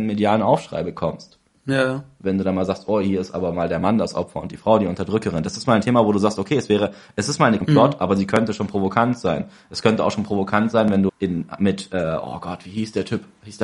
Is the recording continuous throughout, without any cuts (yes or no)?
no